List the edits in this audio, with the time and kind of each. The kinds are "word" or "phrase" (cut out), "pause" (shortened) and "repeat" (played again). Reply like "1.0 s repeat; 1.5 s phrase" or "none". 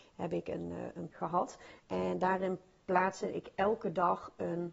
1.1 s word

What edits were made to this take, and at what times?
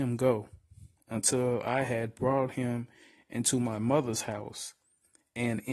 none

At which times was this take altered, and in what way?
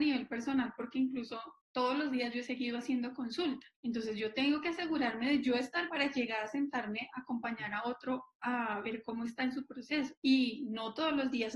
1.6 s pause; 3.7 s pause; 5.9 s word; 10.2 s pause

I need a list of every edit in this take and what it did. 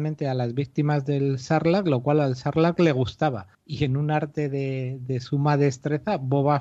3.5 s pause

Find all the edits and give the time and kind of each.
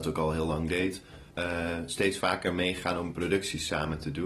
1.3 s pause

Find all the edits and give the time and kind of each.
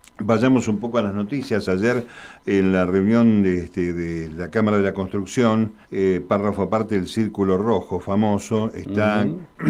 5.8 s pause

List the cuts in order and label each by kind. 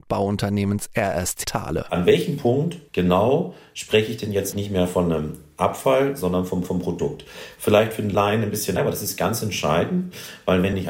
1.4 s word; 2.9 s pause; 4.5 s word; 6.6 s repeat; 8.8 s word

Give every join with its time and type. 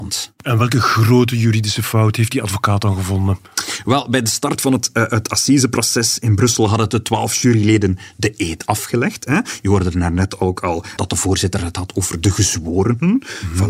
11.0 s word

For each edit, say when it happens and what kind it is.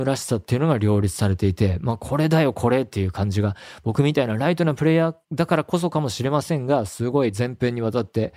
5.2 s pause

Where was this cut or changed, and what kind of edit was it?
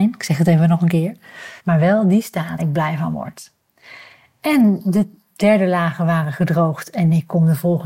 1.6 s pause; 2.6 s word

